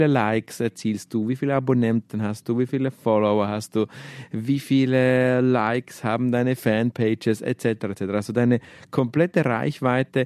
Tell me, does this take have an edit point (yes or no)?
no